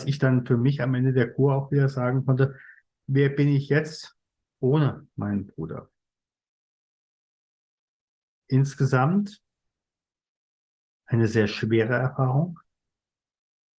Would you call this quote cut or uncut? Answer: uncut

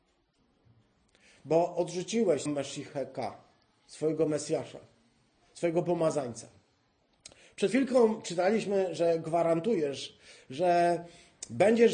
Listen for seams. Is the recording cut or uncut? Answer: cut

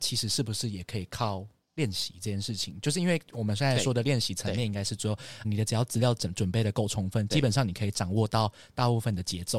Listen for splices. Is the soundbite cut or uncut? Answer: cut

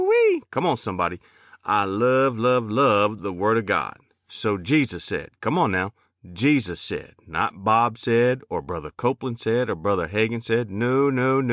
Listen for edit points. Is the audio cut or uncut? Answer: uncut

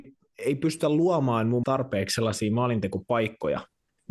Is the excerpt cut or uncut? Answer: cut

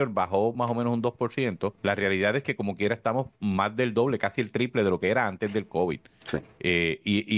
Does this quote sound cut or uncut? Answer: cut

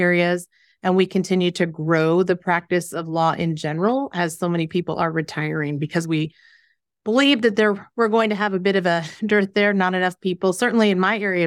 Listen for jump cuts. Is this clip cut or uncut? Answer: uncut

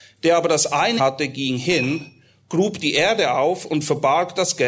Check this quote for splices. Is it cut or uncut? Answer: cut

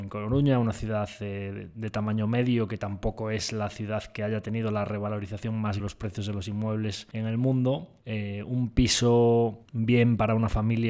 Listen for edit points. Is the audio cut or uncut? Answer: cut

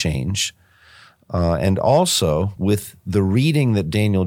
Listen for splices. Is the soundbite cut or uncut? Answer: uncut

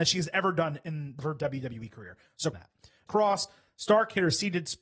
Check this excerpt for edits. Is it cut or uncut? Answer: cut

